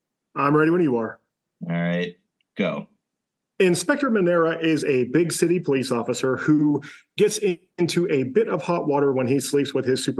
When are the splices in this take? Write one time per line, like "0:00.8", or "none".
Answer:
none